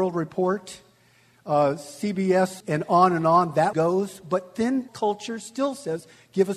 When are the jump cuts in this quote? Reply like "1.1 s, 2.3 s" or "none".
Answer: 2.6 s, 3.7 s, 4.9 s